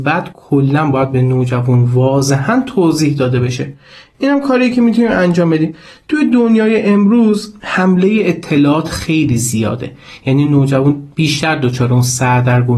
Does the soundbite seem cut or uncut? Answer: uncut